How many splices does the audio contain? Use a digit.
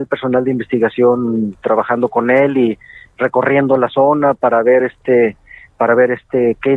0